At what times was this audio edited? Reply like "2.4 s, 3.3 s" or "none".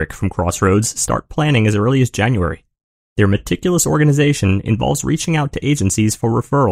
none